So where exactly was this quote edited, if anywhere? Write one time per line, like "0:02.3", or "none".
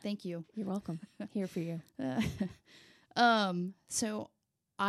none